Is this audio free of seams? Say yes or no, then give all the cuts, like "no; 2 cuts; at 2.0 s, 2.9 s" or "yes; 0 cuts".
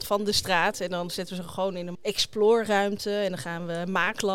no; 1 cut; at 1.9 s